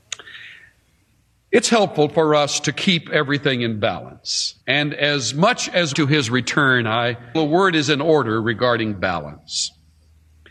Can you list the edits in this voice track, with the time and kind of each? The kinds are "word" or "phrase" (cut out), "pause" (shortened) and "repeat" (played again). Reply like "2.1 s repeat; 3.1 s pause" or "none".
4.6 s pause; 5.9 s phrase; 7.3 s word